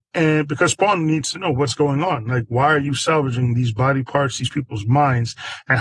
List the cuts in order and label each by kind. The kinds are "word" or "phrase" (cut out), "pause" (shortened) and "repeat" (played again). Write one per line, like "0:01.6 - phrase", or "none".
none